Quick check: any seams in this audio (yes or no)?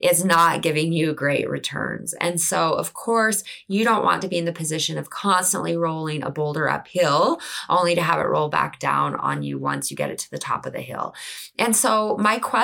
no